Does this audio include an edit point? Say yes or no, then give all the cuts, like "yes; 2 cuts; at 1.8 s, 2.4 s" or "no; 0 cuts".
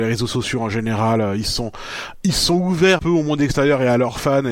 yes; 1 cut; at 3.0 s